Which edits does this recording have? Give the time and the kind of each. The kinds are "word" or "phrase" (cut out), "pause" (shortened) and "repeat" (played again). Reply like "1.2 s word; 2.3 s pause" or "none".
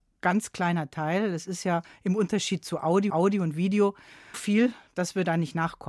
3.1 s repeat; 4.3 s word